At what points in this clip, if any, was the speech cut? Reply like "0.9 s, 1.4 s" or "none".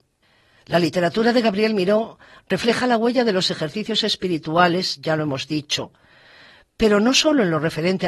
none